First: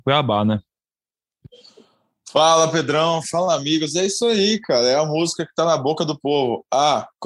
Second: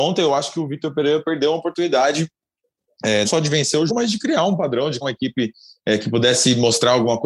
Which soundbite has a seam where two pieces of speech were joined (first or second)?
second